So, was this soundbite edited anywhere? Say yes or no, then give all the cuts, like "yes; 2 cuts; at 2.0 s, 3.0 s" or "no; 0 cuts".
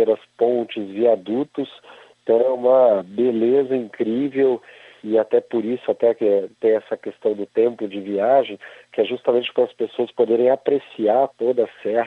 no; 0 cuts